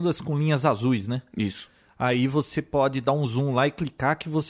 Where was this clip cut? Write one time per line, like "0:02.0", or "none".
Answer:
none

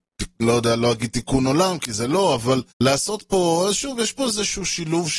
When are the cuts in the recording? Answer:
0:02.7

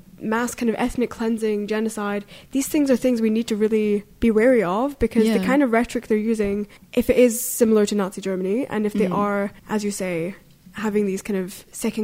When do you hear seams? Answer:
0:06.8
0:09.6

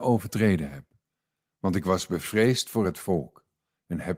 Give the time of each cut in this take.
none

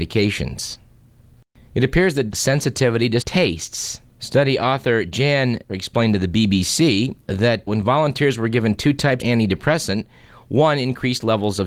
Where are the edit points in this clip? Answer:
0:02.3
0:03.2
0:04.1
0:05.7
0:07.7
0:09.2

